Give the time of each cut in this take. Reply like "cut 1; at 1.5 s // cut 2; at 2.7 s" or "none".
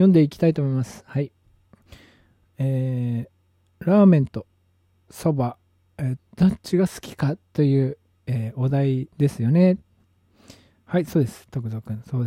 cut 1; at 6.2 s // cut 2; at 9.1 s